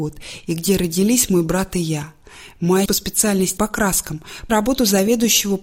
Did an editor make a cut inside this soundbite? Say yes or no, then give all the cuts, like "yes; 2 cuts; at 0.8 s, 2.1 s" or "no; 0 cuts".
yes; 3 cuts; at 2.9 s, 3.6 s, 4.5 s